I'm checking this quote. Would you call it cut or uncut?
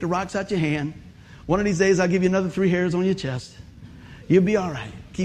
uncut